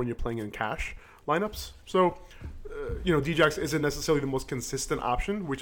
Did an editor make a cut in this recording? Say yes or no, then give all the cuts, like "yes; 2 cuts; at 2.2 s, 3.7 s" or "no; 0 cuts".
no; 0 cuts